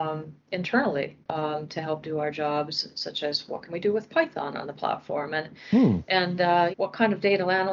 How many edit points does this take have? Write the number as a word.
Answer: two